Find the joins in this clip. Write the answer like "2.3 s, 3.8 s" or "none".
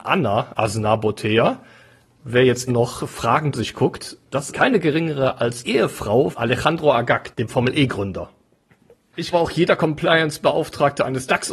2.7 s, 3.5 s, 4.5 s, 5.6 s, 6.3 s, 9.3 s